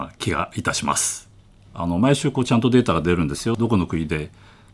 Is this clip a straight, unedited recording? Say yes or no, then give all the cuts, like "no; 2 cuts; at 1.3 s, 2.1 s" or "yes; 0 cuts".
yes; 0 cuts